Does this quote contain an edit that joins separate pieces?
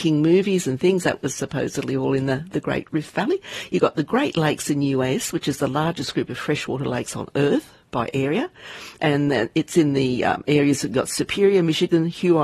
no; 0 cuts

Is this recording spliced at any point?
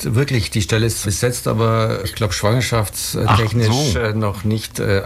yes; 2 cuts; at 1.0 s, 2.0 s

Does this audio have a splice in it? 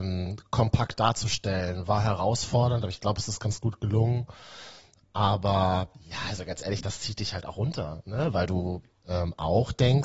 no; 0 cuts

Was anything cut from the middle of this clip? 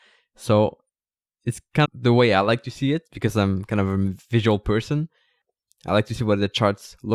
yes; 1 cut; at 1.8 s

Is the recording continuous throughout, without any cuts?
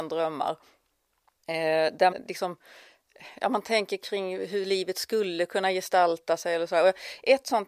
no; 1 cut; at 2.1 s

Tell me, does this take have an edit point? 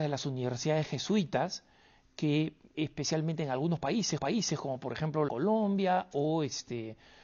yes; 3 cuts; at 2.7 s, 4.2 s, 5.3 s

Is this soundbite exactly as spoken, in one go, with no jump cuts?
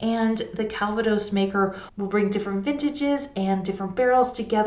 yes; 0 cuts

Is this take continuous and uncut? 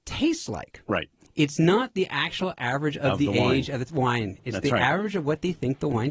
yes; 0 cuts

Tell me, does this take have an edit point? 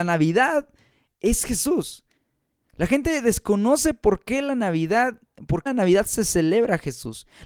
yes; 1 cut; at 5.7 s

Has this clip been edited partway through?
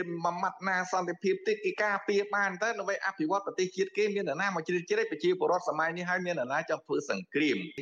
no; 0 cuts

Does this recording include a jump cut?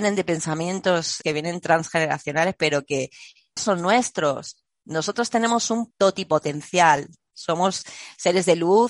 yes; 3 cuts; at 1.2 s, 3.6 s, 5.9 s

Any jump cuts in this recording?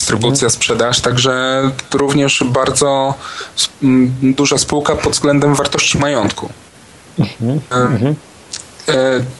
no; 0 cuts

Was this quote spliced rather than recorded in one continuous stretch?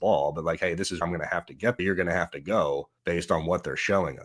yes; 3 cuts; at 1.0 s, 1.8 s, 3.0 s

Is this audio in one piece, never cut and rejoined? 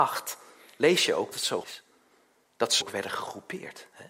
no; 3 cuts; at 1.3 s, 1.6 s, 2.8 s

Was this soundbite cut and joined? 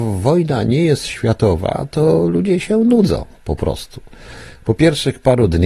no; 0 cuts

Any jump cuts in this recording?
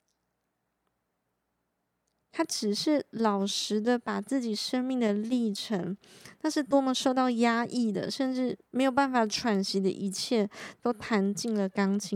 yes; 1 cut; at 8.6 s

